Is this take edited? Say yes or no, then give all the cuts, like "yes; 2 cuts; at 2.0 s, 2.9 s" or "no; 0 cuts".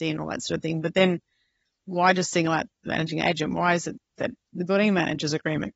no; 0 cuts